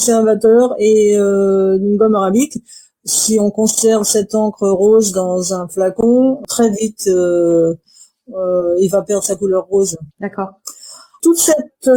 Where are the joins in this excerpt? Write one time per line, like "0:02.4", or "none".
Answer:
0:10.1